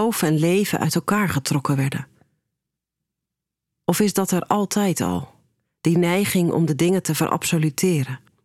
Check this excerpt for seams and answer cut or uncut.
uncut